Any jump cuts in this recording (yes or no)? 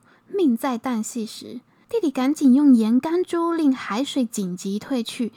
no